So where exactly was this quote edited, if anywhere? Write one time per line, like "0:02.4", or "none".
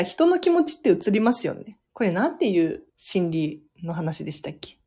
0:01.9
0:02.9